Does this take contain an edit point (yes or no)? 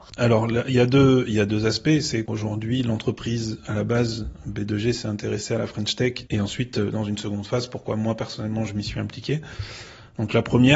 yes